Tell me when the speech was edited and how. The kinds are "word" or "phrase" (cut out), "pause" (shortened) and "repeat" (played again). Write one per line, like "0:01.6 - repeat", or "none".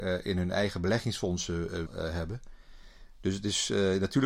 0:01.9 - word